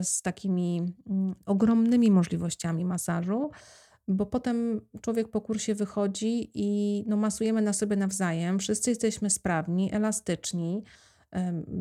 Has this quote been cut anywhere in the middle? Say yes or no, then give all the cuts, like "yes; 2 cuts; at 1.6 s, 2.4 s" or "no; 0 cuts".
no; 0 cuts